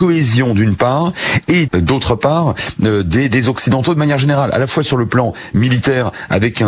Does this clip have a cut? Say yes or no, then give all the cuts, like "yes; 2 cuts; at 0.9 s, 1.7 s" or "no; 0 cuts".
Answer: yes; 1 cut; at 1.7 s